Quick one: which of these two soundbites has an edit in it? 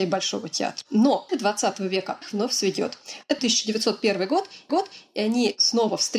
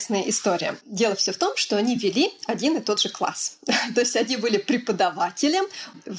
first; 4 cuts; at 1.3 s, 2.2 s, 3.4 s, 4.7 s

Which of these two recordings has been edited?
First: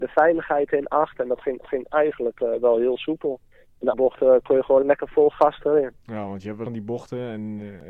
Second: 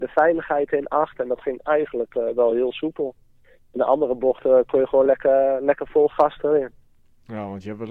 first; 6 cuts; at 1.6 s, 3.5 s, 3.9 s, 4.8 s, 6.0 s, 6.7 s

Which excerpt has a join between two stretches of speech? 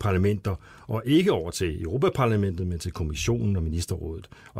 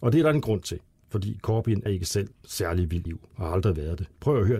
second; 3 cuts; at 1.9 s, 2.3 s, 3.1 s

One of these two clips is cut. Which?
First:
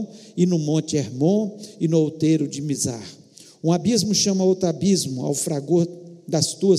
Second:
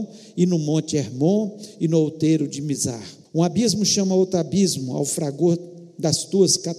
second; 1 cut; at 3.2 s

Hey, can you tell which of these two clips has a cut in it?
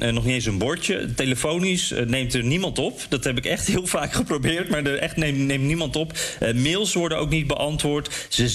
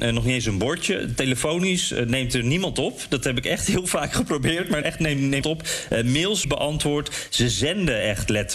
second; 3 cuts; at 4.8 s, 5.4 s, 6.4 s

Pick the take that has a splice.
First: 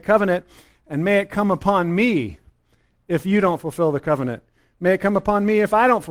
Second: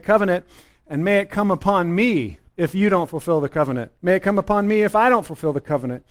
second; 2 cuts; at 2.5 s, 4.0 s

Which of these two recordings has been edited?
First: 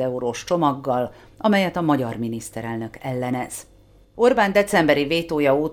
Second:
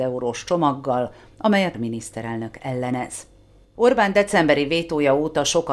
second; 1 cut; at 1.7 s

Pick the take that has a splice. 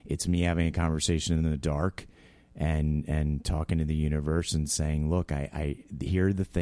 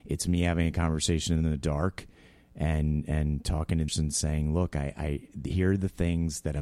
second; 1 cut; at 3.9 s

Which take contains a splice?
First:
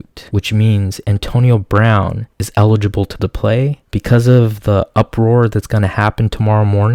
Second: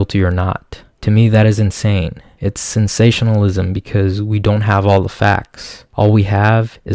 first; 1 cut; at 3.2 s

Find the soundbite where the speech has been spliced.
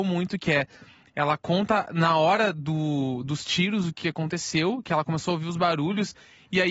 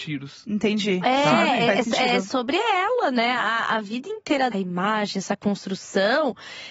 second; 1 cut; at 4.5 s

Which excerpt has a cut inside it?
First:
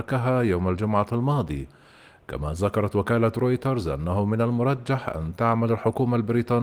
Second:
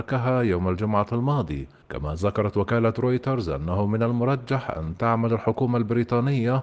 second; 1 cut; at 1.8 s

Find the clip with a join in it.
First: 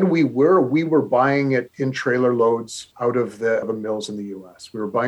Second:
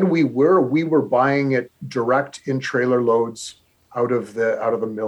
first; 3 cuts; at 1.7 s, 2.9 s, 3.6 s

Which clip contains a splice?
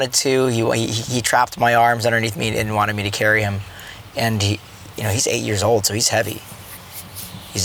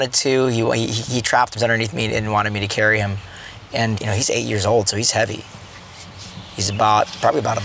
second; 2 cuts; at 1.5 s, 3.9 s

